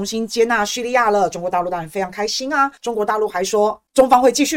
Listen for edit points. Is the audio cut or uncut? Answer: cut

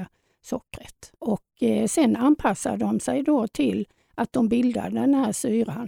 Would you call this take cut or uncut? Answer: cut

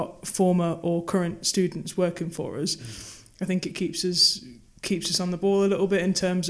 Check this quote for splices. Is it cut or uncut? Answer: uncut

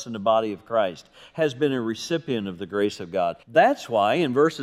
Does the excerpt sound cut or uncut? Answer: cut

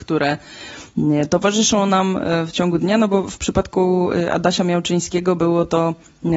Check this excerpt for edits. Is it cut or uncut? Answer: uncut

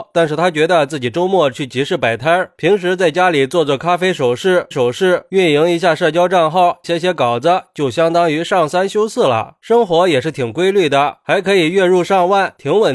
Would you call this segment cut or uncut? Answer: cut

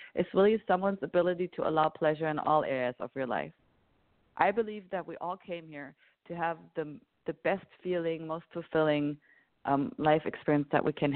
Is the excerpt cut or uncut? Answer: uncut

